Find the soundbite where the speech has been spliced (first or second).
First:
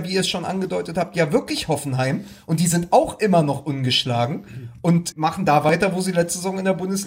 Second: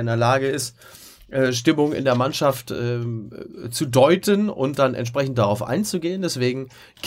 first